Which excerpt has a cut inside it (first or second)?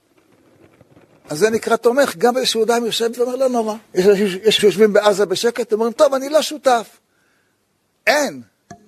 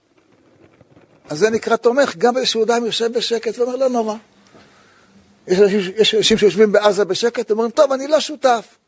first